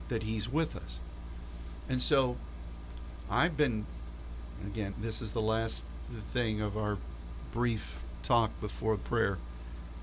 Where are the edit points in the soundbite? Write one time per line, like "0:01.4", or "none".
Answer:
0:04.9